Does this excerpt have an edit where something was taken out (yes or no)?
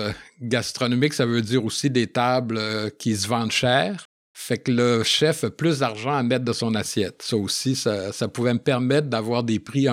no